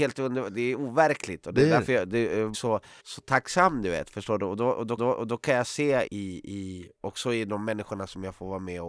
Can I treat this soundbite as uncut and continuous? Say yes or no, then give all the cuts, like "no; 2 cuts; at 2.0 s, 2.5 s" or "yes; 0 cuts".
no; 4 cuts; at 2.5 s, 3.0 s, 5.0 s, 6.1 s